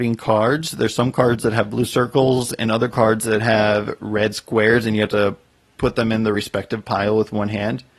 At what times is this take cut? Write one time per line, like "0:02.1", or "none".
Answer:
none